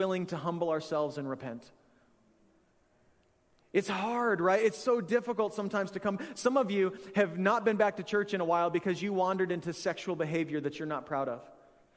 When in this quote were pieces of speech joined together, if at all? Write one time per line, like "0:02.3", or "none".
none